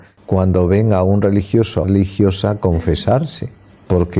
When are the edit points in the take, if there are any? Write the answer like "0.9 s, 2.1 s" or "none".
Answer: 1.8 s